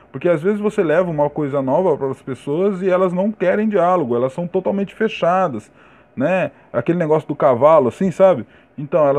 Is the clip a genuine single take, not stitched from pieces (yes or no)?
yes